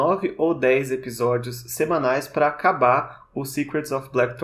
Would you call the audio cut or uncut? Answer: uncut